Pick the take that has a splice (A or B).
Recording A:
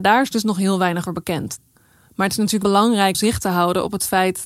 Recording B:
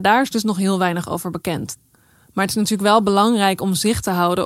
A